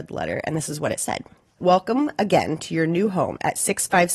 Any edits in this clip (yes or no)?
yes